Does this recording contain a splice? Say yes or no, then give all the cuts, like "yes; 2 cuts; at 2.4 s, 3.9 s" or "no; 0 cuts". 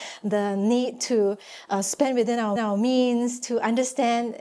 yes; 1 cut; at 2.6 s